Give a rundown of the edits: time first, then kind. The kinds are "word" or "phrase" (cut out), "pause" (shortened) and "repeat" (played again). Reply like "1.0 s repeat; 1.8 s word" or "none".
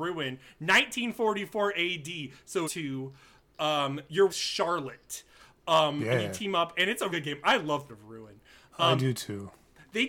2.6 s phrase; 4.3 s word; 7.1 s word; 7.9 s word